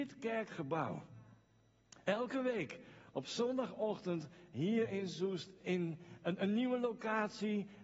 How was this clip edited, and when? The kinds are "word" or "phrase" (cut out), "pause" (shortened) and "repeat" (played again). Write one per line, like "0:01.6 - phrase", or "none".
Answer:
none